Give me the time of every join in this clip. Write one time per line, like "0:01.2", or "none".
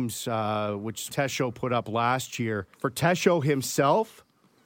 0:01.1
0:02.7